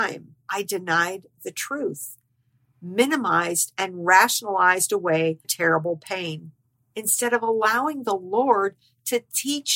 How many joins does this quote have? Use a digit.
1